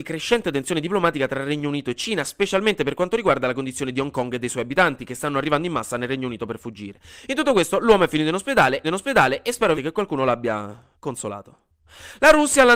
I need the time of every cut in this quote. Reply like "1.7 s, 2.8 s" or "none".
8.8 s, 9.7 s, 10.9 s